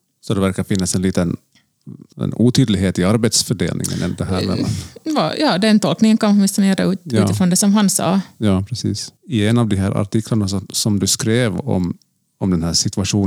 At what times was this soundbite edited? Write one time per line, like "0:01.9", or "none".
0:02.1